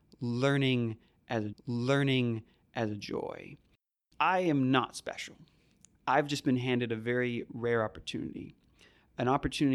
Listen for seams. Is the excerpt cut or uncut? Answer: cut